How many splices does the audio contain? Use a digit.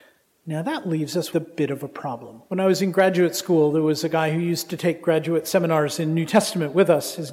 2